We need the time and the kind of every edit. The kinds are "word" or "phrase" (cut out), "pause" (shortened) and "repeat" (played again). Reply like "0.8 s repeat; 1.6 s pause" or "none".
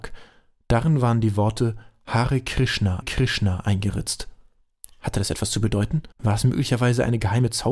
3.0 s repeat; 6.1 s pause

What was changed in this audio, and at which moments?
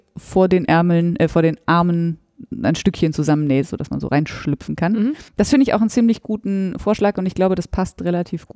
5.3 s pause

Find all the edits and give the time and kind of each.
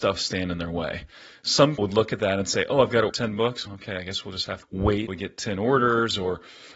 1.8 s word; 3.1 s word; 3.7 s word; 4.6 s word; 5.1 s word

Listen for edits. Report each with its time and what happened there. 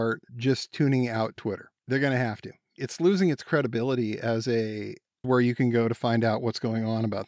1.8 s pause; 5.2 s phrase

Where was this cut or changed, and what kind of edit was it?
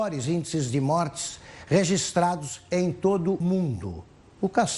3.4 s word

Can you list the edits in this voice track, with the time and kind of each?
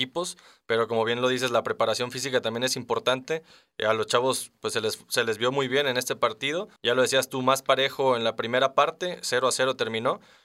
6.8 s pause

